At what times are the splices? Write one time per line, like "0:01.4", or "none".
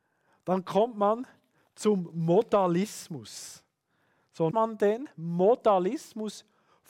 0:04.5